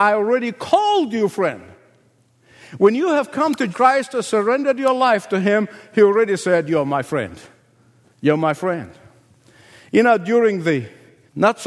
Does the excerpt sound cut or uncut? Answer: cut